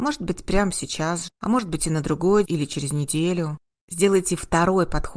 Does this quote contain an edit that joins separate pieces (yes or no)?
yes